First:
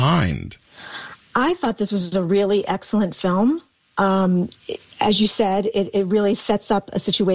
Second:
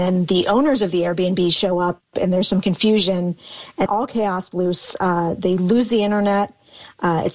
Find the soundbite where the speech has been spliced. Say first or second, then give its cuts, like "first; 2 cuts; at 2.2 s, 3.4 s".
second; 2 cuts; at 3.9 s, 4.5 s